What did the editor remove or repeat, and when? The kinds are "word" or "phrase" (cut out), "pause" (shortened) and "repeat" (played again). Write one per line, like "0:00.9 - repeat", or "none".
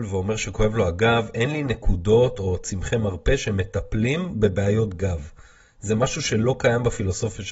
none